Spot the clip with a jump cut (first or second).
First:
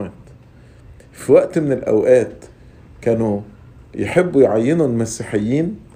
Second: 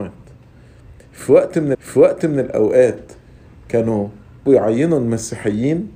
second